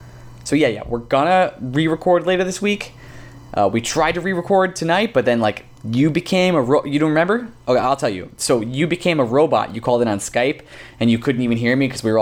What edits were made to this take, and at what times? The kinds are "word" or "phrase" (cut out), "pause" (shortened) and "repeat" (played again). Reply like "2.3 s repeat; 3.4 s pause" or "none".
none

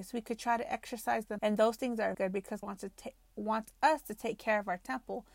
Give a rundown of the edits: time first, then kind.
1.4 s word; 2.1 s word; 2.6 s word

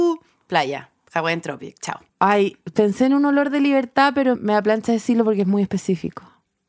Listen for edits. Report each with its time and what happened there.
2.1 s pause; 4.3 s word

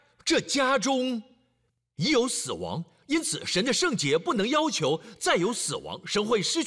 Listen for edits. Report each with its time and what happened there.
none

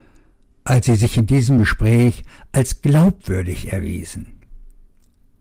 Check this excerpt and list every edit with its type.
none

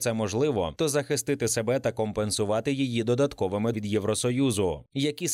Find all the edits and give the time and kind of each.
3.7 s word

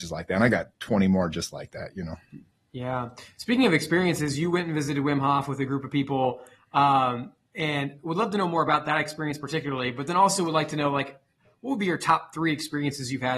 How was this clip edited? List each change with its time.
none

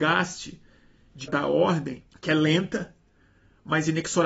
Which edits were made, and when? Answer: 1.3 s word; 2.1 s pause

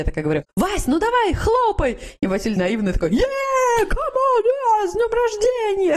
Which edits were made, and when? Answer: 2.6 s phrase

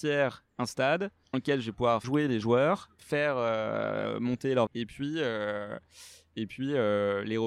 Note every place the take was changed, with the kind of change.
1.3 s word; 2.0 s word; 2.4 s word; 3.0 s word; 4.7 s word

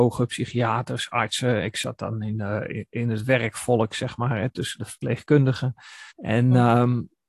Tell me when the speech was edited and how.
6.1 s pause

